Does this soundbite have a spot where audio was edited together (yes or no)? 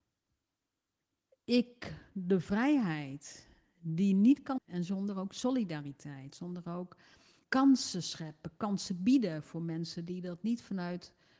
yes